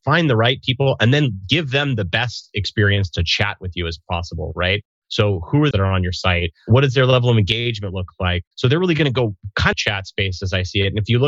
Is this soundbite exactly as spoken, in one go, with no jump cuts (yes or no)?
no